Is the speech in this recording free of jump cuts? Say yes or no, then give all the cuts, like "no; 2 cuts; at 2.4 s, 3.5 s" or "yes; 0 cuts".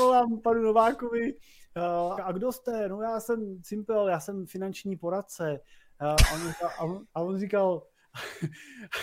no; 2 cuts; at 2.2 s, 7.1 s